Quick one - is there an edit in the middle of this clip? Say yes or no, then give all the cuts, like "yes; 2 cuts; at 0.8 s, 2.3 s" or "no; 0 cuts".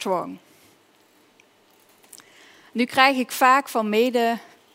no; 0 cuts